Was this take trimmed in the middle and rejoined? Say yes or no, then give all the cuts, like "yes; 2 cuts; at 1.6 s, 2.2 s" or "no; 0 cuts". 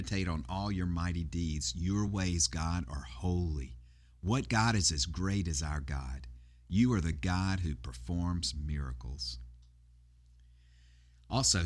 no; 0 cuts